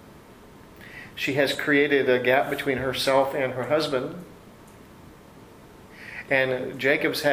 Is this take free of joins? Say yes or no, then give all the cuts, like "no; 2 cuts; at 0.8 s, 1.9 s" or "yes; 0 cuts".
yes; 0 cuts